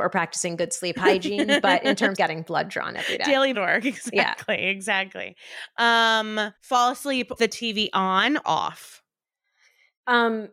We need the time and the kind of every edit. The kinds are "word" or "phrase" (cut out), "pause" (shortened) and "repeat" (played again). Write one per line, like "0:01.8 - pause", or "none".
0:02.2 - word
0:03.5 - word
0:06.6 - pause
0:07.4 - word
0:08.4 - word